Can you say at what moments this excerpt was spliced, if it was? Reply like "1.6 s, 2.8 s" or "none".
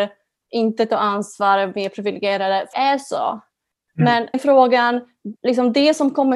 2.7 s, 4.3 s, 5.4 s